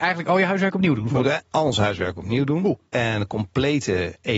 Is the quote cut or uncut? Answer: uncut